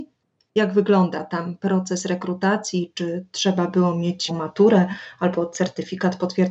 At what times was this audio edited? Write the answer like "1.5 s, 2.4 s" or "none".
4.3 s

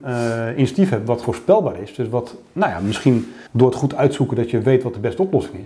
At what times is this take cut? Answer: 1.2 s, 3.5 s

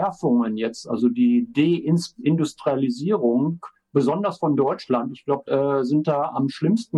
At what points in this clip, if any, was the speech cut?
5.5 s

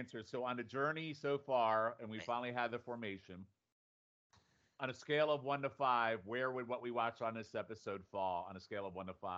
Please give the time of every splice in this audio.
none

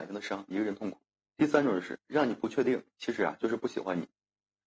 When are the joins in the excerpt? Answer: 1.1 s

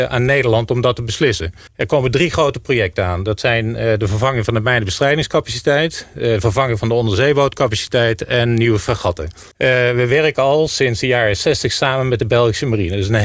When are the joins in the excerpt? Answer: 1.7 s, 9.5 s

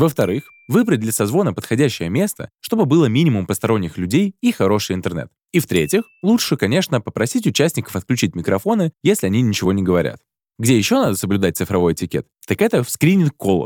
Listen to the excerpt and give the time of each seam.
none

